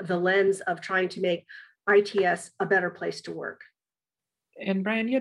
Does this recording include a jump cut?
no; 0 cuts

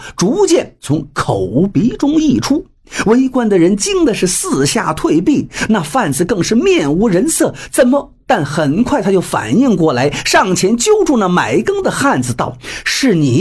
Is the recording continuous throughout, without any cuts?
yes; 0 cuts

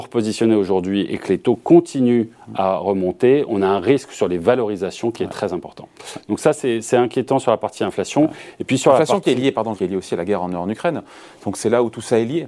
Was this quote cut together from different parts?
yes; 1 cut; at 9.7 s

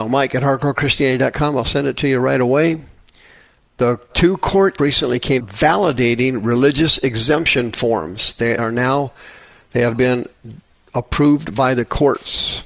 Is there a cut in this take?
yes; 5 cuts; at 4.1 s, 4.8 s, 5.4 s, 8.6 s, 9.9 s

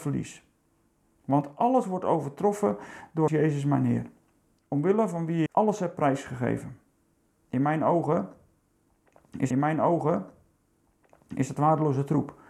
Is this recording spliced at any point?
yes; 3 cuts; at 3.3 s, 5.5 s, 9.5 s

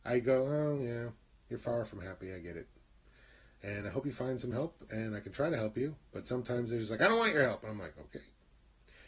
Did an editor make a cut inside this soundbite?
no; 0 cuts

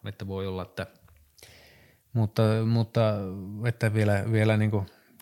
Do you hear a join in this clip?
no; 0 cuts

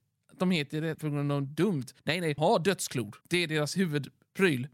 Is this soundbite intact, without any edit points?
no; 4 cuts; at 0.9 s, 2.0 s, 2.4 s, 3.2 s

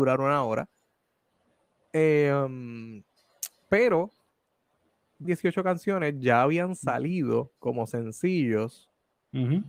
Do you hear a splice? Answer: yes; 1 cut; at 5.2 s

